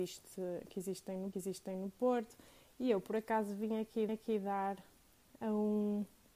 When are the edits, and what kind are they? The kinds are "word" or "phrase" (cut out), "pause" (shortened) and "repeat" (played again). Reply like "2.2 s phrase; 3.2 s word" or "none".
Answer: 1.3 s repeat; 4.1 s repeat